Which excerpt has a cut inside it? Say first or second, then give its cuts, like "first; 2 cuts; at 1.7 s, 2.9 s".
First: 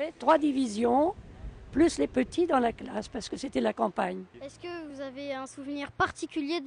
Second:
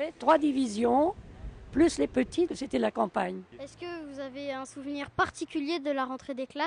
second; 1 cut; at 2.5 s